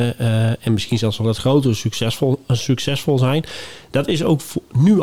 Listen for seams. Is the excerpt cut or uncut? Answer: uncut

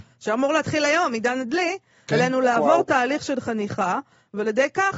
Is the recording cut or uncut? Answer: uncut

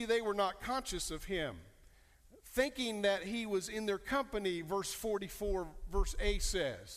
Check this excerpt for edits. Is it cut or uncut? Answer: uncut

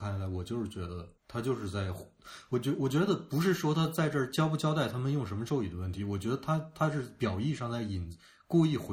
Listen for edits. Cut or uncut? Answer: cut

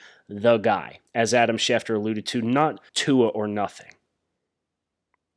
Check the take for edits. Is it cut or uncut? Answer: cut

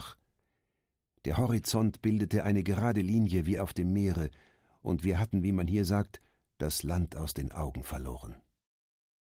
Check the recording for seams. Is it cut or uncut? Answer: uncut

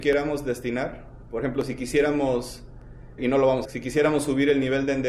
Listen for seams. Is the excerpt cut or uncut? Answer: cut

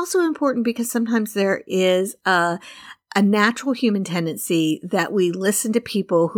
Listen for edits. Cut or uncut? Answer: uncut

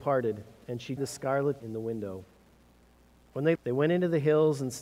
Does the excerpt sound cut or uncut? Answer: cut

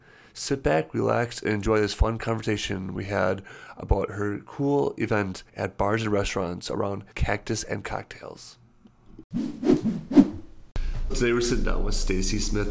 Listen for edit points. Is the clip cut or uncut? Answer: cut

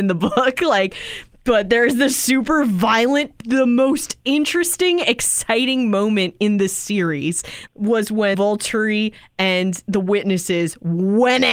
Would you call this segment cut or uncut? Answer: cut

